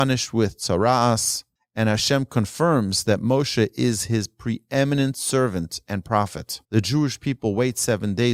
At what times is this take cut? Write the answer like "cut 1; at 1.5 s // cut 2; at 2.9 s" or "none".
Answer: cut 1; at 1.6 s // cut 2; at 6.6 s